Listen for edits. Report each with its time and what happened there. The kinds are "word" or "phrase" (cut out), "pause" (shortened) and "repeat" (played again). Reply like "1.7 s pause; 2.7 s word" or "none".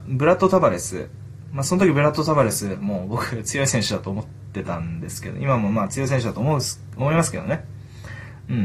none